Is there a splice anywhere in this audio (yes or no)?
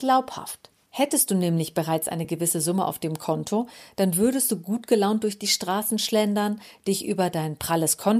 no